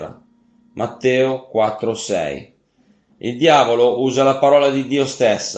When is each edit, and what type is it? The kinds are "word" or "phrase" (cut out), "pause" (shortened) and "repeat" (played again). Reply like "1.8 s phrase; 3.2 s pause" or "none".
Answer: none